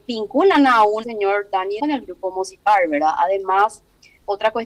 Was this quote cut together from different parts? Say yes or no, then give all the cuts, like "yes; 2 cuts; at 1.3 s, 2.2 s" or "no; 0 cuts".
yes; 2 cuts; at 1.0 s, 1.8 s